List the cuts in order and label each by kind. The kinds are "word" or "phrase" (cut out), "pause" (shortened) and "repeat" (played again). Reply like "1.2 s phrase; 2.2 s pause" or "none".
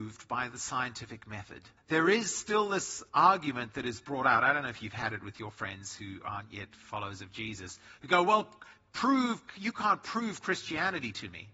1.8 s pause; 3.1 s pause